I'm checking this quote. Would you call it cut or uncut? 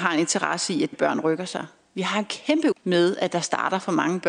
cut